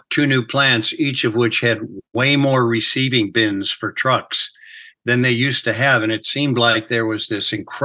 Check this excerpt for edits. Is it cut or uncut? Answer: cut